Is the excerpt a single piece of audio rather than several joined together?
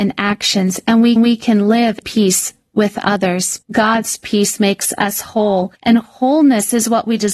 no; 4 cuts; at 1.2 s, 2.0 s, 3.6 s, 5.7 s

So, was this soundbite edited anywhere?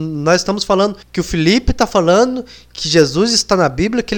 yes; 1 cut; at 1.0 s

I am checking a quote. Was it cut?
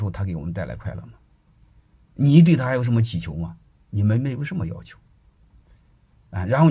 no; 0 cuts

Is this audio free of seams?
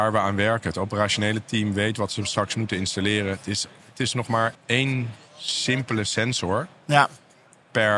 no; 1 cut; at 4.5 s

